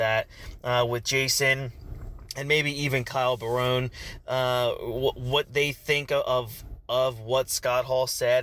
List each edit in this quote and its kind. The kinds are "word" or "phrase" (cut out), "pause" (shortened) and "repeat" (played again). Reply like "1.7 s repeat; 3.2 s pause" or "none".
none